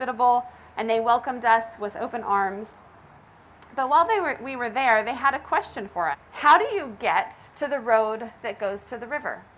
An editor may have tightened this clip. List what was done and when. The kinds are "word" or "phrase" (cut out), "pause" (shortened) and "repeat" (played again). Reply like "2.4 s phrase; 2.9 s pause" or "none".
6.1 s word; 7.5 s pause